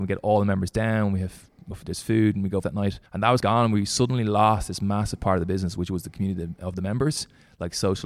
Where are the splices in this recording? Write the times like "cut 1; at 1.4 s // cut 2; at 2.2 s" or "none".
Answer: cut 1; at 1.7 s // cut 2; at 2.6 s // cut 3; at 3.1 s // cut 4; at 3.4 s